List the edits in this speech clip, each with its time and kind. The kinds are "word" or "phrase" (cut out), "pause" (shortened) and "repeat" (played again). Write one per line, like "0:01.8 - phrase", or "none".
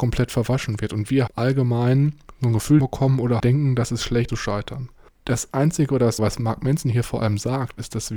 0:01.3 - word
0:02.8 - word
0:03.4 - word
0:04.3 - word
0:06.2 - word